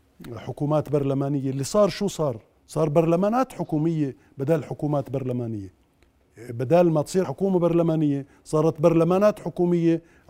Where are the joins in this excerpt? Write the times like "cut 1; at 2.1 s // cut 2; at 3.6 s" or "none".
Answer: cut 1; at 7.2 s